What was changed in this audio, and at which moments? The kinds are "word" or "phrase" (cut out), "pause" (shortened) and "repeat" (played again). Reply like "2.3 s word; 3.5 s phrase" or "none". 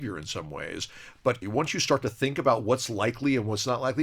1.4 s word